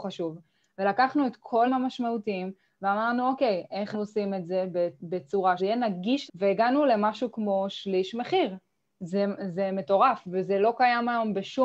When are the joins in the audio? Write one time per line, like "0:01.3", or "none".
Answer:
0:01.6
0:03.9
0:05.6
0:06.3